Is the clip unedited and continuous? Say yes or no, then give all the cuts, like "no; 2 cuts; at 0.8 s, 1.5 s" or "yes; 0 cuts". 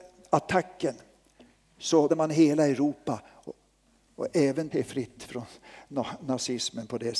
no; 2 cuts; at 2.1 s, 4.7 s